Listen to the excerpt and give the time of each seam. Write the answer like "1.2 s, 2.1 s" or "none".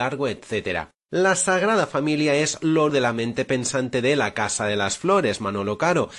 2.9 s